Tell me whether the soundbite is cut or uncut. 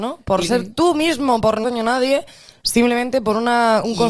cut